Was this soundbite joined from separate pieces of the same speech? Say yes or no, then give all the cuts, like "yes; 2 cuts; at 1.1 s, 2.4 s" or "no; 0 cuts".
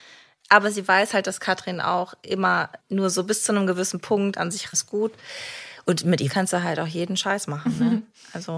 yes; 3 cuts; at 2.8 s, 4.7 s, 6.3 s